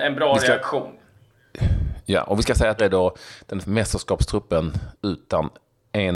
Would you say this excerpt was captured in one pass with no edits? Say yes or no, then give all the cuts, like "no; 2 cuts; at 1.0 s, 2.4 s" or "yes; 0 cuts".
no; 3 cuts; at 2.8 s, 3.6 s, 4.9 s